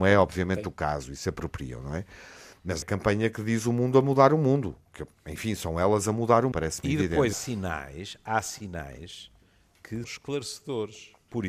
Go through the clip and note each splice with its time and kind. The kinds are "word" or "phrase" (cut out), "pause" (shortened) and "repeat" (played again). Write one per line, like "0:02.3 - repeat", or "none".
0:02.8 - word
0:06.5 - word
0:07.3 - word
0:10.0 - word